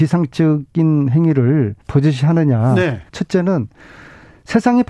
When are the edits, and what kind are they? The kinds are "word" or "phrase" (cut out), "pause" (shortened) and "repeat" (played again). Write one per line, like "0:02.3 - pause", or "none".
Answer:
0:01.8 - pause
0:03.1 - pause

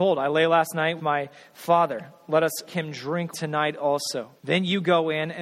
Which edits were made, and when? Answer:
0:01.0 - word
0:02.7 - word
0:03.3 - word
0:04.4 - pause

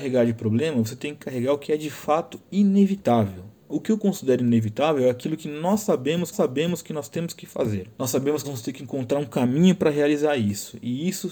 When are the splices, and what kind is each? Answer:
0:03.6 - pause
0:06.3 - repeat
0:07.9 - pause
0:08.4 - phrase

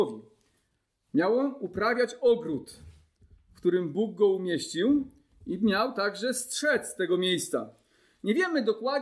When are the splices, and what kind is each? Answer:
none

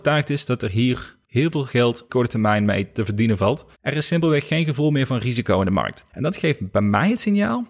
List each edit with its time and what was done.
0:01.2 - pause
0:02.1 - phrase
0:03.7 - pause
0:06.1 - pause

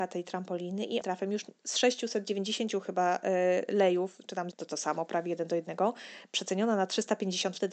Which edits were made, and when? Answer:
0:01.0 - phrase
0:04.5 - word

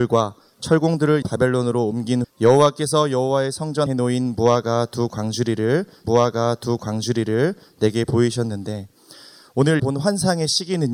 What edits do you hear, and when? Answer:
0:01.2 - word
0:02.2 - word
0:03.9 - word
0:06.0 - repeat
0:09.8 - word

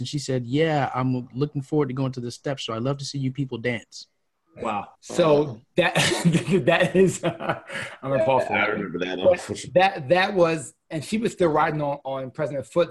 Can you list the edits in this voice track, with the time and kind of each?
0:04.9 - pause
0:12.0 - word

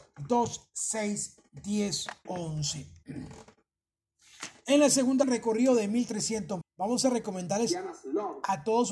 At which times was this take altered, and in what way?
0:02.3 - word
0:05.2 - word
0:06.6 - word

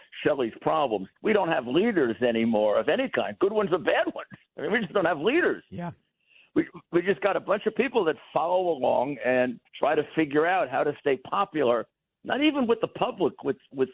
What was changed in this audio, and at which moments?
0:01.2 - pause
0:09.7 - pause

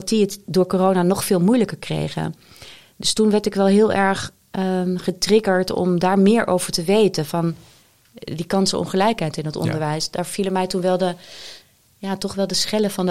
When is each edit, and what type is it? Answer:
none

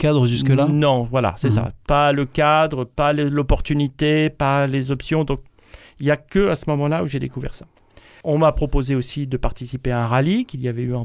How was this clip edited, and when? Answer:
none

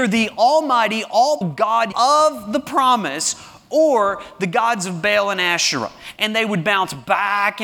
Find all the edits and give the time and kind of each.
0:01.4 - word
0:01.9 - word

